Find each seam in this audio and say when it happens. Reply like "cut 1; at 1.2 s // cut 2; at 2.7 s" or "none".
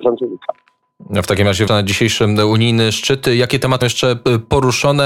cut 1; at 1.7 s // cut 2; at 3.8 s